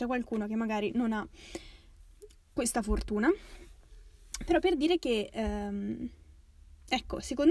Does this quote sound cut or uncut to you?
uncut